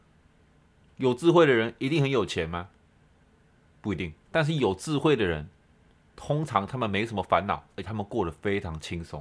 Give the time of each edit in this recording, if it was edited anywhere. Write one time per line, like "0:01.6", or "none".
0:04.2